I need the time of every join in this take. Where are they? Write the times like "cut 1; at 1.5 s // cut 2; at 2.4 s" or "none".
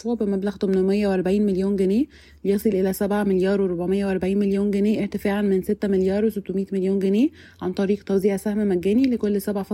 none